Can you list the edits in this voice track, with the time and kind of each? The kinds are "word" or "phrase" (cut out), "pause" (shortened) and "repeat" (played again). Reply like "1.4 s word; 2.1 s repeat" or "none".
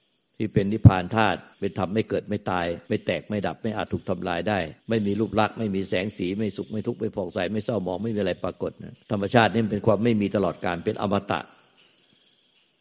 1.5 s pause; 2.8 s pause; 4.8 s pause; 9.0 s pause